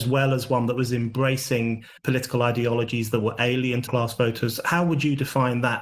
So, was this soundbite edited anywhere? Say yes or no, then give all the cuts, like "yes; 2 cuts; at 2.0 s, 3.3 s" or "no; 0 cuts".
yes; 2 cuts; at 2.0 s, 3.9 s